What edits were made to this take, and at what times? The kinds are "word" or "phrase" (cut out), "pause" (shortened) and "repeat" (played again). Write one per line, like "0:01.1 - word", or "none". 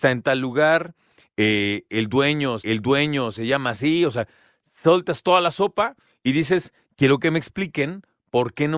0:02.6 - repeat